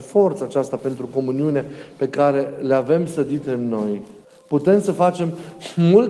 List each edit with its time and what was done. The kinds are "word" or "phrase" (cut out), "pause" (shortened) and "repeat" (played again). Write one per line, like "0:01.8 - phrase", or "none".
0:04.2 - pause